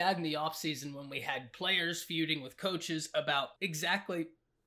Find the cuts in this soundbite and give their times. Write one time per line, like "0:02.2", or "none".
0:03.6